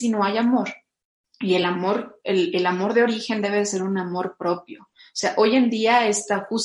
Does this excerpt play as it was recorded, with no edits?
yes; 0 cuts

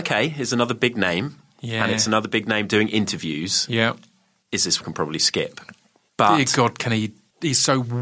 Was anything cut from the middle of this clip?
yes; 1 cut; at 4.8 s

